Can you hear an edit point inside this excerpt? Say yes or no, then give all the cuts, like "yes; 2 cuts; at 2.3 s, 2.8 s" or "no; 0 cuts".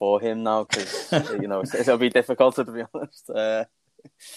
yes; 1 cut; at 2.7 s